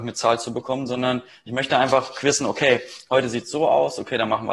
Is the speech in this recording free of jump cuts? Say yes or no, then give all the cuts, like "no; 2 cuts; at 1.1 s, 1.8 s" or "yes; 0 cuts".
yes; 0 cuts